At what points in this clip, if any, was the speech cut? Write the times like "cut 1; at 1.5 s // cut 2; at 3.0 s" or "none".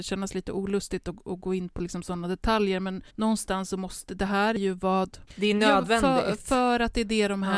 cut 1; at 3.1 s // cut 2; at 5.3 s